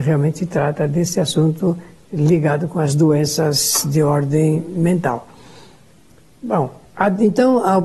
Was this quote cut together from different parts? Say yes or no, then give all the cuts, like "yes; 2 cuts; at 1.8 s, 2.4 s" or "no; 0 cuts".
no; 0 cuts